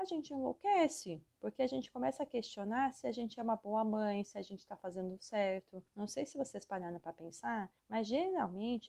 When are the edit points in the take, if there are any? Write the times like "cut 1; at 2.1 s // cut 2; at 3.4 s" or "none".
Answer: cut 1; at 1.3 s // cut 2; at 5.9 s // cut 3; at 7.8 s